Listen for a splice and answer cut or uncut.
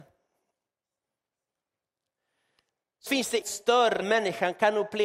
cut